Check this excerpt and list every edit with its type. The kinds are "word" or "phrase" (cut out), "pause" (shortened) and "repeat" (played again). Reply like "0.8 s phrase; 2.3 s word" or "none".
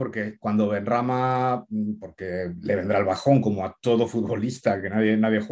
none